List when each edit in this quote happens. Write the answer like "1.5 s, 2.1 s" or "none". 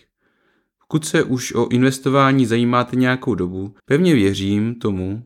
3.8 s